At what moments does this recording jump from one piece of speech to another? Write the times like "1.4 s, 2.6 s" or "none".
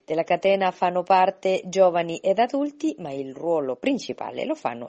none